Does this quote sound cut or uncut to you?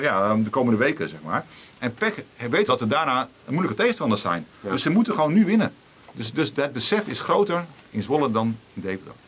cut